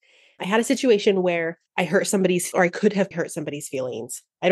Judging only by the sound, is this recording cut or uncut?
cut